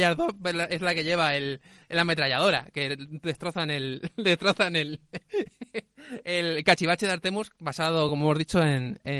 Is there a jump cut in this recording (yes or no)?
no